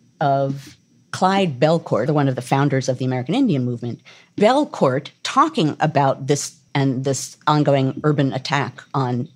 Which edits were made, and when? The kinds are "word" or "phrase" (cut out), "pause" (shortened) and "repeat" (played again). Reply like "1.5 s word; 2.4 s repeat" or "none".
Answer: 2.1 s word; 6.7 s word